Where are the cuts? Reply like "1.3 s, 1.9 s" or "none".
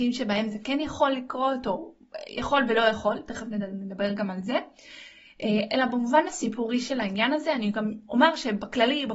none

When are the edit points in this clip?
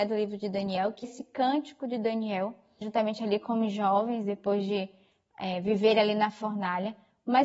1.0 s, 2.8 s

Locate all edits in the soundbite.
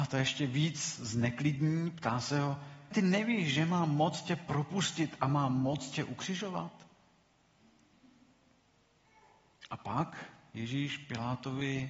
2.9 s

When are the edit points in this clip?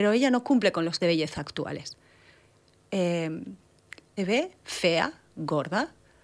1.0 s, 4.2 s

